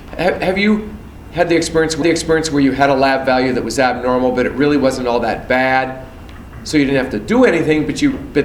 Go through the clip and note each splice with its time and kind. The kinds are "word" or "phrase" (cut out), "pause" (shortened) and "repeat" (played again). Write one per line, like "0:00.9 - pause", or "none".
0:02.0 - repeat